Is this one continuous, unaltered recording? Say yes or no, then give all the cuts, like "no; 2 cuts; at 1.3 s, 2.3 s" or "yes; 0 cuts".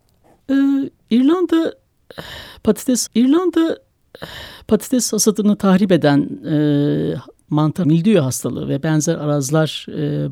no; 2 cuts; at 3.1 s, 7.8 s